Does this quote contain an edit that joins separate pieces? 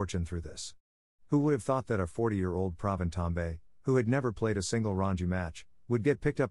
no; 0 cuts

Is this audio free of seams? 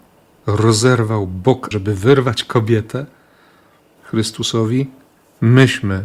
no; 1 cut; at 1.7 s

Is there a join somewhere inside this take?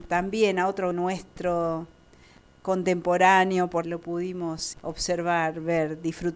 yes; 3 cuts; at 0.9 s, 3.8 s, 4.7 s

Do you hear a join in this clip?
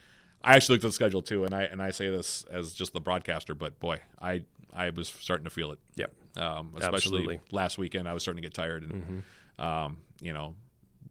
no; 0 cuts

